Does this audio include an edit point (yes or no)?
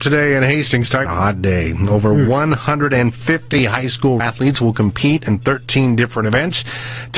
yes